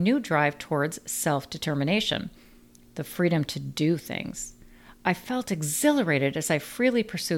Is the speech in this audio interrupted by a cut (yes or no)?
no